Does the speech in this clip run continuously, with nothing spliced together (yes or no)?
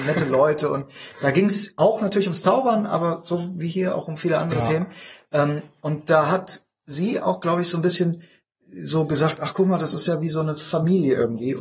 yes